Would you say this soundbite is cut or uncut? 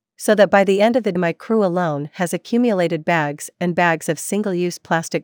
cut